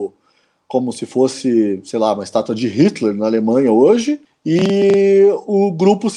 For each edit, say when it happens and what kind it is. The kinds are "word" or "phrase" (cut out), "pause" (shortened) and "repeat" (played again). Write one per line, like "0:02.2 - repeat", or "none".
0:04.3 - pause